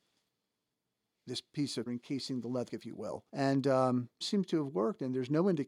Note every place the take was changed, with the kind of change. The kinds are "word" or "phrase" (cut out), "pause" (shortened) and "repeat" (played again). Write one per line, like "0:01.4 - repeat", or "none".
0:01.9 - word
0:02.7 - word
0:03.3 - pause
0:04.2 - phrase

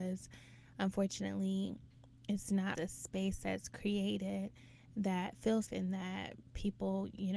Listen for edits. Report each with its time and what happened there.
0:02.7 - word
0:05.7 - word

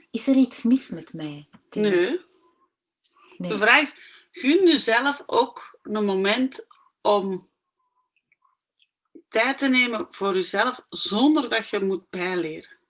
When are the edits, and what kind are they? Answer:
none

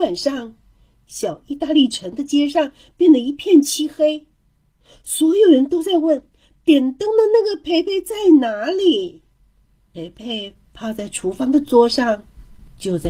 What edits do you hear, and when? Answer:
none

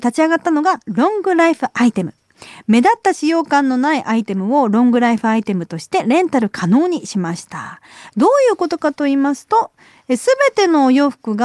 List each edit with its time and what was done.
none

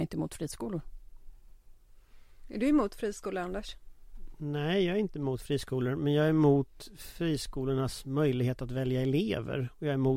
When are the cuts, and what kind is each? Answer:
none

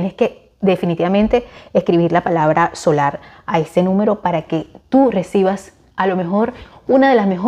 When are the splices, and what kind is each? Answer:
none

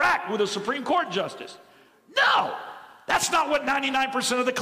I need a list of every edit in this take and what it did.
none

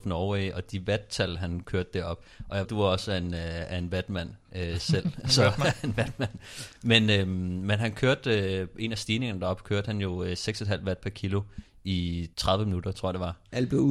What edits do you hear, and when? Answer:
0:02.6 - word
0:12.3 - pause

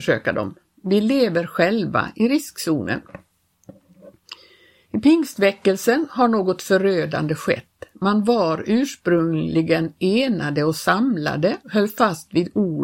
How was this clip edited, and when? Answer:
0:11.6 - pause

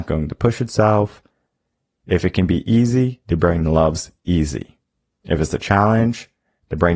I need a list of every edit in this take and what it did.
none

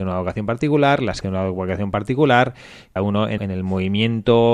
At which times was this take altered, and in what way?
0:01.2 - word
0:03.0 - word
0:03.4 - word

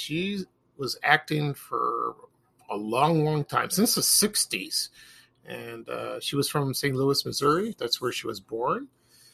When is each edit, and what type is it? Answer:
none

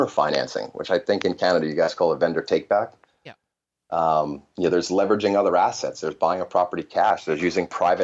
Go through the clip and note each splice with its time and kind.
none

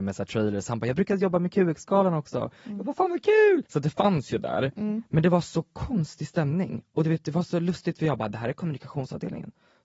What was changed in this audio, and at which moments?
0:03.7 - pause

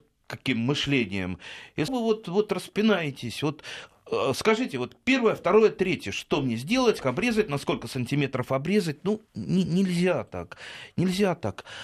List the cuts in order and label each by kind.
0:01.9 - phrase
0:07.0 - word
0:09.3 - pause

